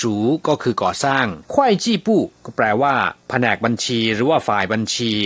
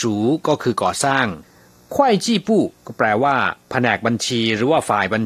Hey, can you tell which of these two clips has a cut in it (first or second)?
first